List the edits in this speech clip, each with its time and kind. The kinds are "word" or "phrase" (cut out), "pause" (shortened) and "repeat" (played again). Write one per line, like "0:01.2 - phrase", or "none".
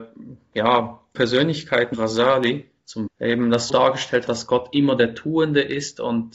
0:01.1 - word
0:01.9 - word
0:03.1 - word
0:03.7 - word
0:04.3 - word